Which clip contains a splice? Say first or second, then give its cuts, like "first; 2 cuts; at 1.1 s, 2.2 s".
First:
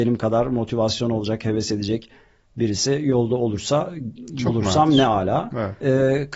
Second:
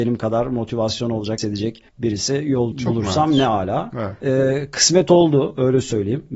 second; 3 cuts; at 1.4 s, 1.9 s, 2.7 s